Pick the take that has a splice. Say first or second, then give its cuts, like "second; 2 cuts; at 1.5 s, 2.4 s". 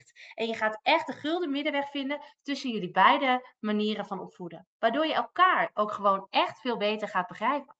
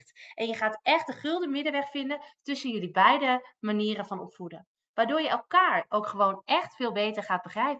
first; 1 cut; at 4.7 s